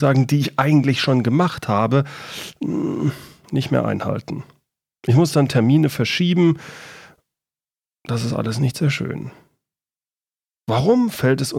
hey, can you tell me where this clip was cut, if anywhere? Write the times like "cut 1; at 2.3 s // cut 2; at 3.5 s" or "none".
none

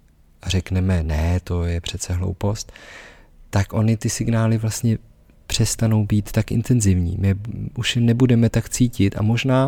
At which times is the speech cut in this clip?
none

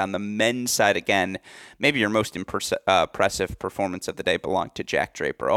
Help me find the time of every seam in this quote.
none

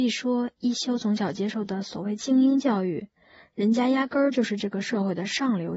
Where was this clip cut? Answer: none

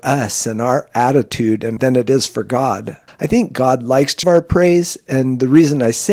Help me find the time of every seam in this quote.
cut 1; at 1.8 s // cut 2; at 3.1 s // cut 3; at 4.2 s

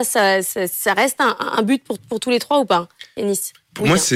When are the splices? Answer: none

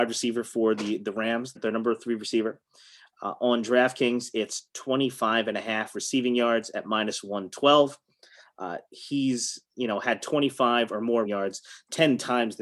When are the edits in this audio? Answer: cut 1; at 1.6 s // cut 2; at 11.3 s

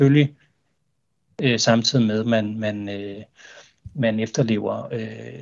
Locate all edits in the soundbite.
none

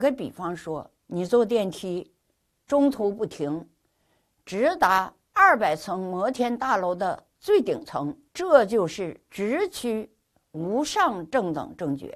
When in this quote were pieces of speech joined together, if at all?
cut 1; at 1.0 s // cut 2; at 5.2 s // cut 3; at 8.3 s

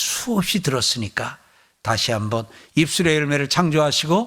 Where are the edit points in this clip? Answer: none

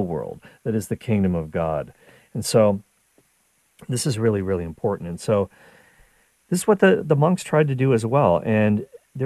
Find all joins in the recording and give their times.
none

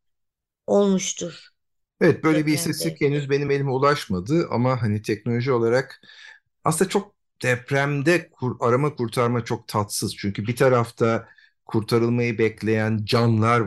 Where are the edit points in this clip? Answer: none

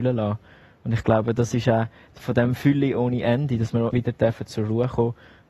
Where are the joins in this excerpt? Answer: cut 1; at 2.2 s // cut 2; at 3.9 s

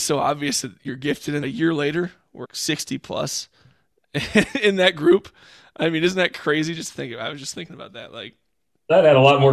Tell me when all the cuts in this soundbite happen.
cut 1; at 1.4 s // cut 2; at 2.4 s

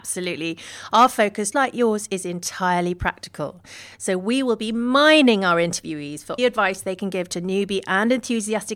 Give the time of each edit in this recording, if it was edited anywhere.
cut 1; at 1.5 s // cut 2; at 6.4 s

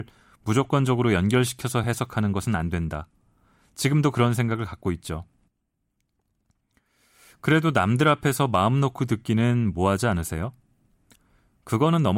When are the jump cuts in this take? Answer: none

